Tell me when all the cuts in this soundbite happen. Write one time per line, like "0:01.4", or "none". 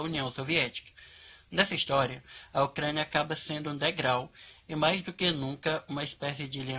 none